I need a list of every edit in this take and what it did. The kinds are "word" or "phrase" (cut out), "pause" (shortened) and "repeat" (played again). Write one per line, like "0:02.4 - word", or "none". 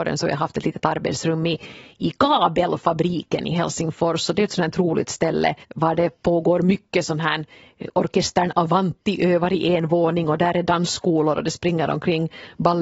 0:05.6 - pause